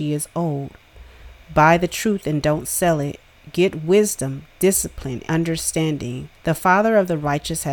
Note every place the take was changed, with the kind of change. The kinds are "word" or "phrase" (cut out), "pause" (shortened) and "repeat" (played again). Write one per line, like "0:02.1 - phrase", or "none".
0:05.2 - word
0:06.3 - pause

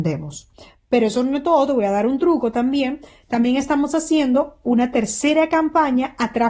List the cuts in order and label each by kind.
none

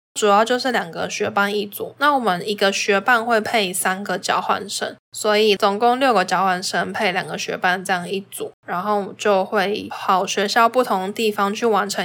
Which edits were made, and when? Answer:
0:05.0 - pause
0:08.6 - pause

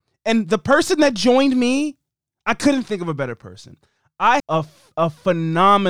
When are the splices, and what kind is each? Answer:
0:04.4 - word

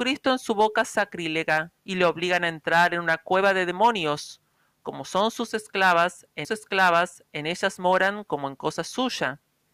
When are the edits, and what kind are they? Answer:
0:01.8 - pause
0:04.8 - word
0:06.4 - repeat

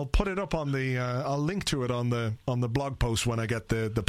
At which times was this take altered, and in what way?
0:02.4 - pause

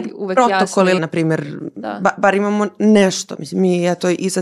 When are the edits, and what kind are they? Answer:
0:01.0 - word

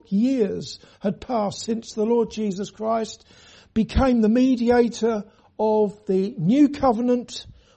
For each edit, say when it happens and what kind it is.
none

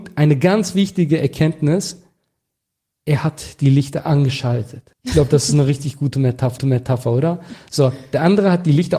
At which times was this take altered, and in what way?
0:04.9 - pause
0:06.6 - repeat

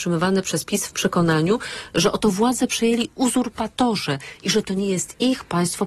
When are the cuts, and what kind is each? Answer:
none

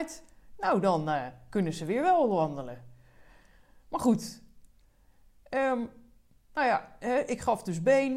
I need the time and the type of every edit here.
none

